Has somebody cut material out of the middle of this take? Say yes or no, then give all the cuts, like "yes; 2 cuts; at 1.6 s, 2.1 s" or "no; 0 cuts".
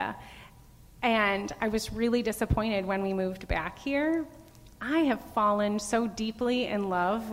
no; 0 cuts